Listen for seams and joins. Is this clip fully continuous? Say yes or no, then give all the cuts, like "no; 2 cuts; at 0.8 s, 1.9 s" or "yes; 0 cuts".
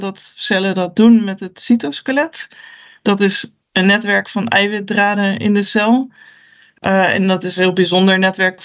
yes; 0 cuts